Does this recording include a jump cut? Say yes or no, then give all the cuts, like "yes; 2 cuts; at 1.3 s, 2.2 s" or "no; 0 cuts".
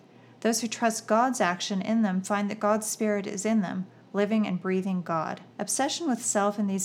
yes; 1 cut; at 5.5 s